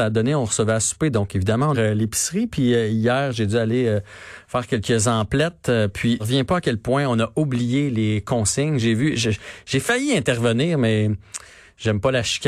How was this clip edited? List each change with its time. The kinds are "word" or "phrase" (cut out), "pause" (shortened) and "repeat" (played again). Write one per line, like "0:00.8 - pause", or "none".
0:01.7 - phrase
0:06.2 - word